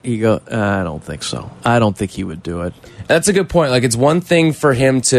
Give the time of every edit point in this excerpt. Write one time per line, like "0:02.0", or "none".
none